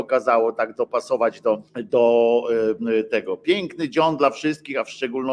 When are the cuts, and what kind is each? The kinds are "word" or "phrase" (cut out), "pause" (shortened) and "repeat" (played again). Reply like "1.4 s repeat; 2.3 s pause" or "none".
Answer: 1.7 s pause